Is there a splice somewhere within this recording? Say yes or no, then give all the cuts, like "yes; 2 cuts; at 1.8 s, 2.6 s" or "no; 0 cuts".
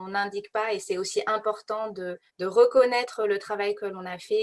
yes; 1 cut; at 2.3 s